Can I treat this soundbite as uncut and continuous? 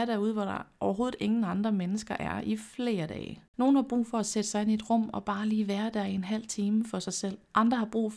no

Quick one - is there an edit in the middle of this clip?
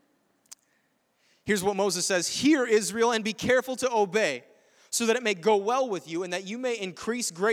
no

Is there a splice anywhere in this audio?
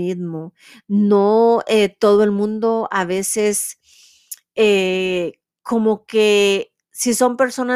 no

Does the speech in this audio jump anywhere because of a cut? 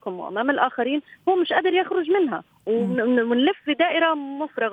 no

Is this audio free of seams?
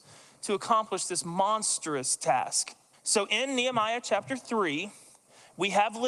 no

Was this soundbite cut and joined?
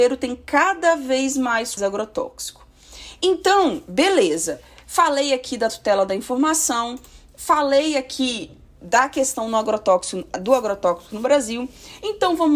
yes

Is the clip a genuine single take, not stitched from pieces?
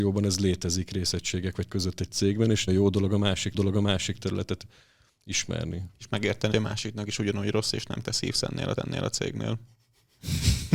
no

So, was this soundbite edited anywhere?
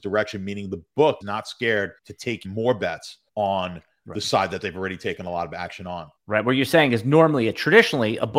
yes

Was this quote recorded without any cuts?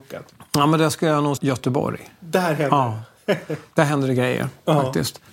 no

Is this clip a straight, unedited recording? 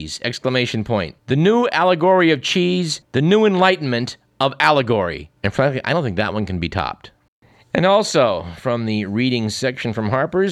no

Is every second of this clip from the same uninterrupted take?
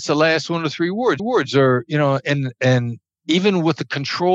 no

